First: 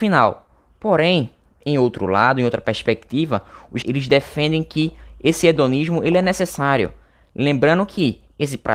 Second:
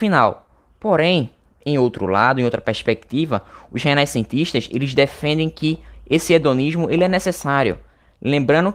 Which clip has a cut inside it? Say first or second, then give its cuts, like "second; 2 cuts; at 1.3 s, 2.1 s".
first; 1 cut; at 3.8 s